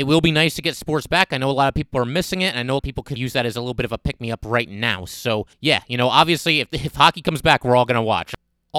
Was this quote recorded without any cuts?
no; 3 cuts; at 2.8 s, 3.2 s, 5.5 s

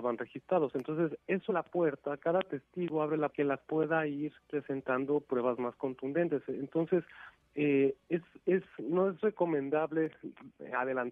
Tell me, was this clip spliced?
yes; 5 cuts; at 1.5 s, 3.3 s, 3.6 s, 4.4 s, 8.7 s

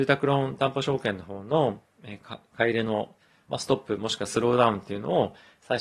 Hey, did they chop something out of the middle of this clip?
no; 0 cuts

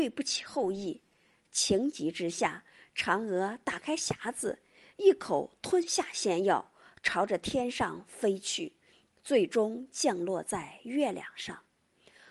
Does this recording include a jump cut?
no; 0 cuts

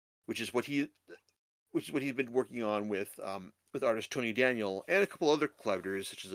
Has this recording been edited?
no; 0 cuts

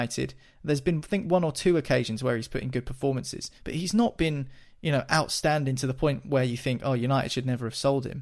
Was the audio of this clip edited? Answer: yes; 1 cut; at 3.6 s

